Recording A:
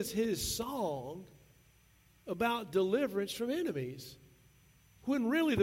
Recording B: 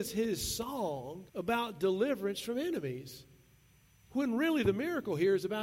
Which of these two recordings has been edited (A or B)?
B